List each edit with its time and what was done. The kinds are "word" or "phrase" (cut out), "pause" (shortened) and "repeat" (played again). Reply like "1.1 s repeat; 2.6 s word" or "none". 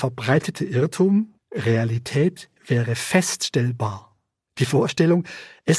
none